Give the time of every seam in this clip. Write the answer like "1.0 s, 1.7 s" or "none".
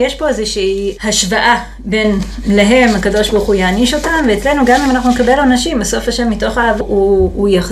6.8 s